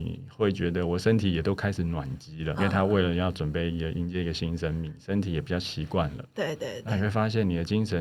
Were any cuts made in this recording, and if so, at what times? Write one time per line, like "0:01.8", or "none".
0:02.6